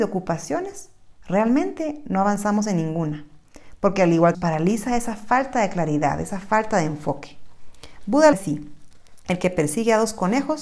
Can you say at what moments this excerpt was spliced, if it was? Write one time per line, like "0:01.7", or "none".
0:04.3
0:08.3